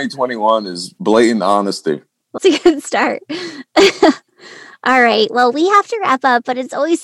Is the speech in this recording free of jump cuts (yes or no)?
no